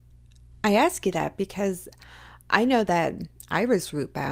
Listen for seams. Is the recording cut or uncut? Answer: uncut